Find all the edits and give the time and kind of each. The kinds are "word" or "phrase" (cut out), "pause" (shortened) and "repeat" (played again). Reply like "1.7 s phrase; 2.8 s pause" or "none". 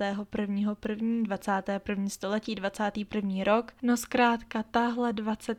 none